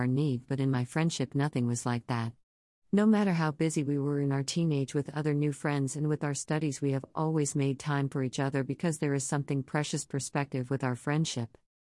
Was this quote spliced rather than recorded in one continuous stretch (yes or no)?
no